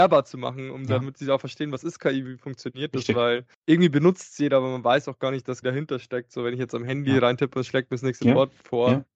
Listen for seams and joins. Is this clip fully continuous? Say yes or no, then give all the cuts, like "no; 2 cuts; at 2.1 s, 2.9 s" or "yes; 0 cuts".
no; 2 cuts; at 3.5 s, 5.6 s